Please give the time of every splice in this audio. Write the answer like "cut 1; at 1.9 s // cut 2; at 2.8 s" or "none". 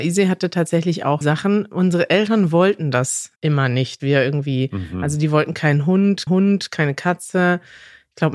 cut 1; at 1.2 s // cut 2; at 3.4 s // cut 3; at 4.0 s // cut 4; at 6.3 s

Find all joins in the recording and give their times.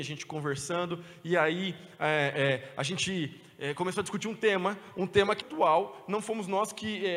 cut 1; at 5.4 s

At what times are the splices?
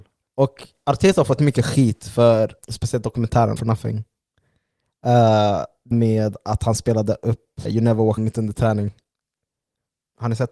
cut 1; at 1.4 s // cut 2; at 2.6 s // cut 3; at 3.6 s // cut 4; at 5.9 s // cut 5; at 7.7 s // cut 6; at 8.2 s

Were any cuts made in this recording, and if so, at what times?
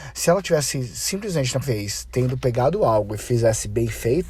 cut 1; at 1.6 s

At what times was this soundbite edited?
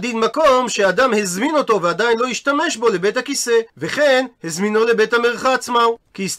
cut 1; at 3.7 s

